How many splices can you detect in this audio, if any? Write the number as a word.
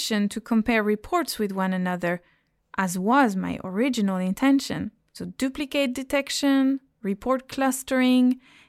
zero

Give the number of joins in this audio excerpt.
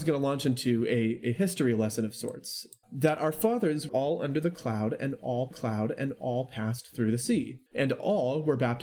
four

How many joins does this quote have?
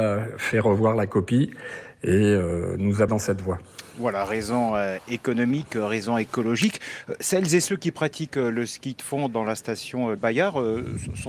two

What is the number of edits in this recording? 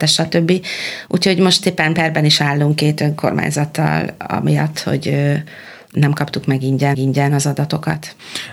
one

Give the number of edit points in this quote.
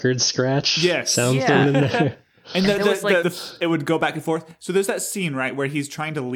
one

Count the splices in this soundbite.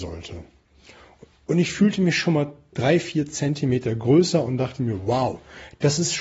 zero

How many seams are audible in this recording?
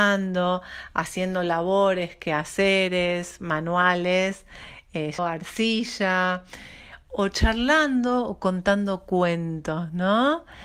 one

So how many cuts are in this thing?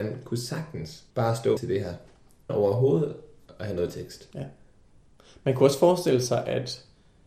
three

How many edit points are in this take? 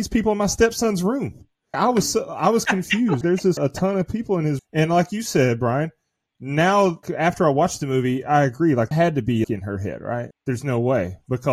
eight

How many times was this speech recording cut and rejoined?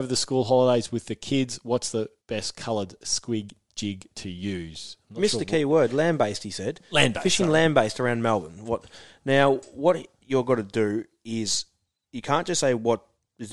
one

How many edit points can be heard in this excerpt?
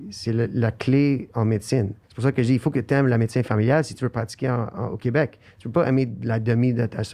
one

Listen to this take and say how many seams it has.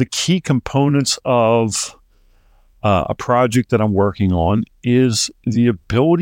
zero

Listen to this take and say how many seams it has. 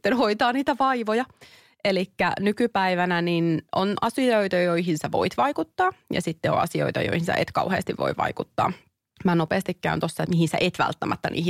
zero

